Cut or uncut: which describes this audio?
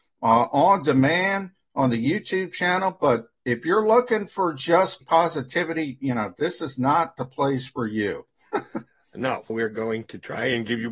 cut